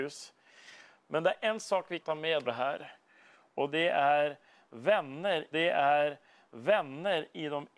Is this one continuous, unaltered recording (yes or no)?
no